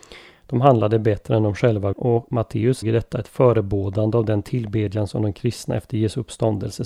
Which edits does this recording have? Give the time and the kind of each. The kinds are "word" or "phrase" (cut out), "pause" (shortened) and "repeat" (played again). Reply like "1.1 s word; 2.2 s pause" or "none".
1.9 s word; 2.8 s word